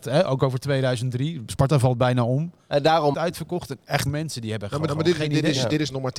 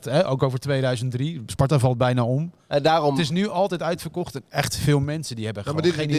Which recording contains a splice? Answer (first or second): first